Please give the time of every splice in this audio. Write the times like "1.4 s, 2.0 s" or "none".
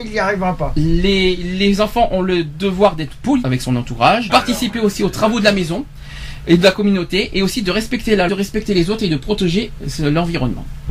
3.4 s, 4.3 s, 8.3 s